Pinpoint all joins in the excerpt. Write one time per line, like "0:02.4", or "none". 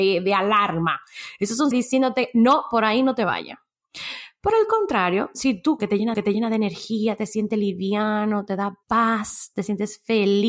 0:01.7
0:05.8
0:06.1
0:08.8